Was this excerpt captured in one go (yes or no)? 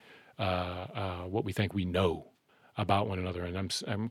no